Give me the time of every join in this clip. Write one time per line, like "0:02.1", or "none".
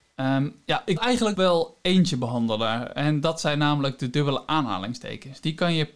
0:01.0
0:01.3